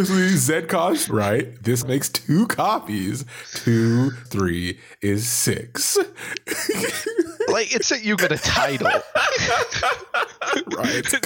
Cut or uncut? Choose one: cut